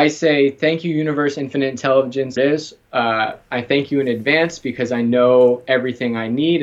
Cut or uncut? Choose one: cut